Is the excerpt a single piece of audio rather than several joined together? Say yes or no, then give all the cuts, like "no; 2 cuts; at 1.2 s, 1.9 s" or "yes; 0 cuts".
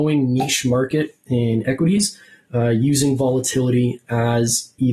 yes; 0 cuts